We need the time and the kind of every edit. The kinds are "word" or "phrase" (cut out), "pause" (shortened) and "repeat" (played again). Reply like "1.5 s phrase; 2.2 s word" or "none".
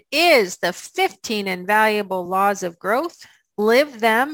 none

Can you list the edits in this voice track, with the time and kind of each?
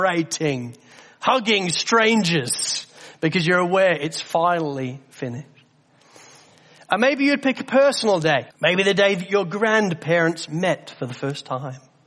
8.5 s pause

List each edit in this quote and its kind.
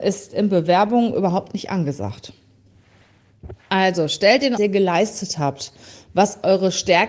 3.6 s pause; 4.6 s phrase

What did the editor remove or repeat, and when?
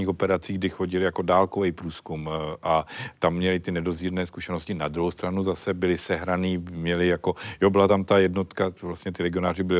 none

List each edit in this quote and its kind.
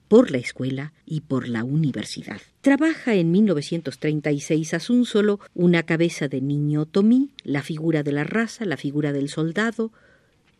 1.0 s pause; 2.5 s pause; 5.5 s pause; 7.4 s pause

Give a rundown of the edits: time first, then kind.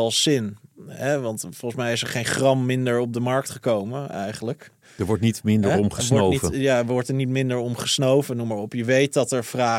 none

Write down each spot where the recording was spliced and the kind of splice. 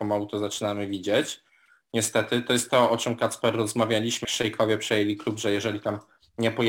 4.2 s word

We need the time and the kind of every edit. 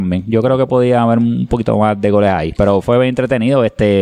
none

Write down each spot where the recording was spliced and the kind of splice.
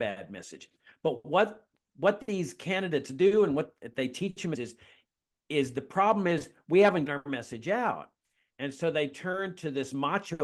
4.5 s phrase; 7.1 s word

